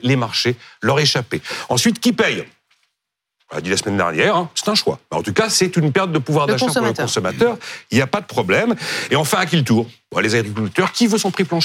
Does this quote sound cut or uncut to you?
uncut